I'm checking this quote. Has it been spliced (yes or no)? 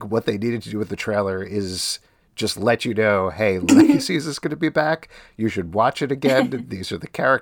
no